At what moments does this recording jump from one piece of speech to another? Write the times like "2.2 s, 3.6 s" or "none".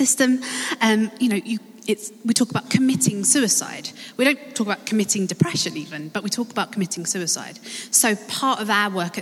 none